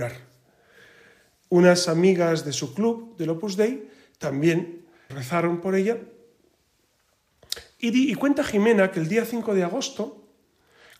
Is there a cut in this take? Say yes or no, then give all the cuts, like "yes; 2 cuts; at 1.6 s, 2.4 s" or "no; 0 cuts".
yes; 1 cut; at 5.1 s